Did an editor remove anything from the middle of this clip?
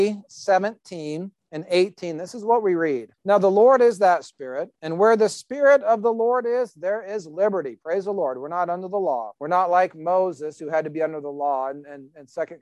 yes; 3 cuts; at 3.1 s, 4.7 s, 9.4 s

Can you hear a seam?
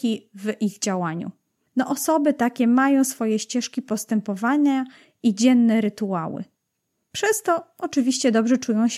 no; 0 cuts

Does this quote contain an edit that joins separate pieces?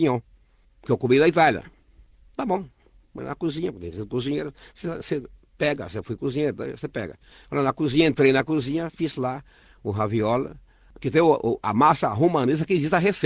no; 0 cuts

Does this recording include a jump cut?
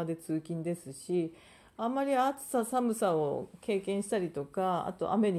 no; 0 cuts

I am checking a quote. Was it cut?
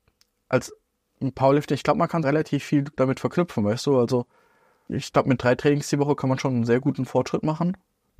yes; 3 cuts; at 2.2 s, 2.9 s, 4.9 s

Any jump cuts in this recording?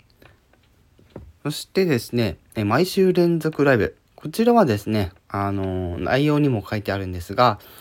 yes; 2 cuts; at 1.4 s, 4.1 s

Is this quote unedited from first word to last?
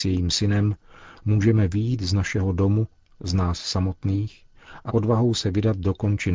no; 1 cut; at 4.9 s

